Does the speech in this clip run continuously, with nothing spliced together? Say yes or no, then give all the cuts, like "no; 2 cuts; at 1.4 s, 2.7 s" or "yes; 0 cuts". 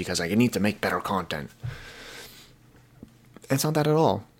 yes; 0 cuts